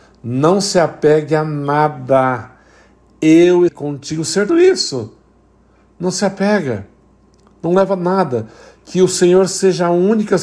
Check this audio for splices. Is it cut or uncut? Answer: cut